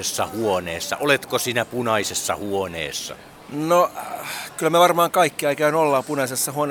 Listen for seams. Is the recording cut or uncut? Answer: uncut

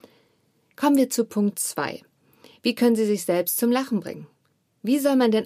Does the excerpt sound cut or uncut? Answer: uncut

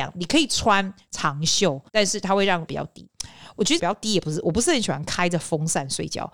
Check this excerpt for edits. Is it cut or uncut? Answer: cut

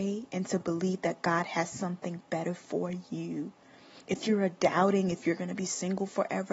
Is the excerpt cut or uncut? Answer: uncut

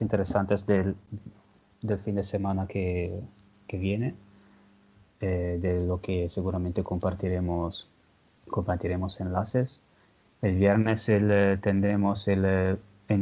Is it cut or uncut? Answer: uncut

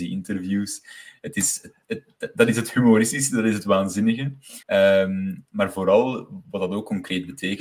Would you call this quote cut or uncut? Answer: cut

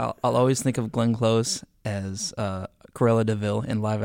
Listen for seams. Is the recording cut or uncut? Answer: uncut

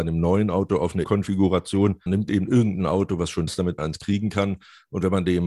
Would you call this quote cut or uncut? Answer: cut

